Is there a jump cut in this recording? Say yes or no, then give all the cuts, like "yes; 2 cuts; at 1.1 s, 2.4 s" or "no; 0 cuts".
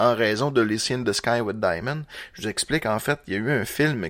no; 0 cuts